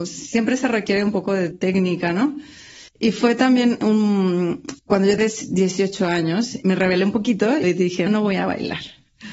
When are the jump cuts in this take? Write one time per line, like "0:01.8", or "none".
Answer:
0:01.5
0:02.9
0:04.8
0:05.2
0:06.6
0:07.6
0:08.1